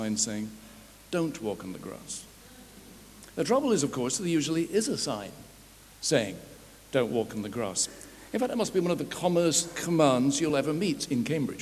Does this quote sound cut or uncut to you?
uncut